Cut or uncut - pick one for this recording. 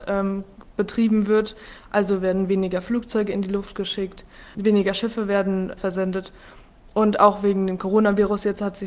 cut